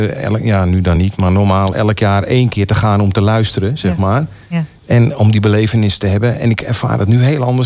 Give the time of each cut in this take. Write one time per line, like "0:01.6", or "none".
none